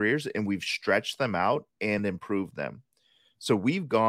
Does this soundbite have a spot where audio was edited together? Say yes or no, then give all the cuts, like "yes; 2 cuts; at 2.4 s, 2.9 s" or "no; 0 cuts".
no; 0 cuts